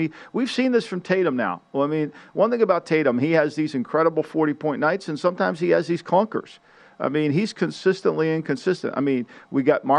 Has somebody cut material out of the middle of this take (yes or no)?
no